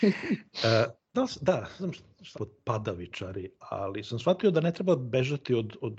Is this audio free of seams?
no; 3 cuts; at 1.1 s, 1.8 s, 2.3 s

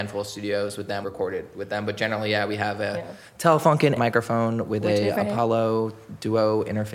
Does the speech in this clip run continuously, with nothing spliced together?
no; 3 cuts; at 1.0 s, 4.0 s, 5.1 s

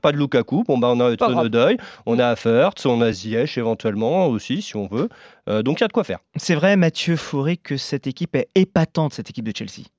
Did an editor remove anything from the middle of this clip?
no; 0 cuts

